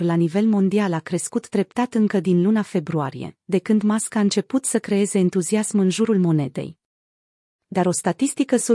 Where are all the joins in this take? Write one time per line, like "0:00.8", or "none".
none